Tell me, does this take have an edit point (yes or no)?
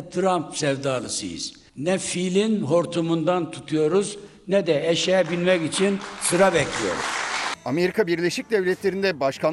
yes